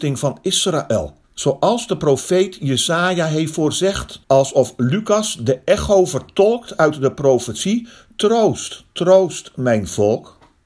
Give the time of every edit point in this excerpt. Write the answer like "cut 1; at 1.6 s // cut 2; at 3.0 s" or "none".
cut 1; at 1.2 s // cut 2; at 4.2 s